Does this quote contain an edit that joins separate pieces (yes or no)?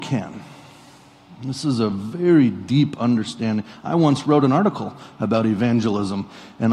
no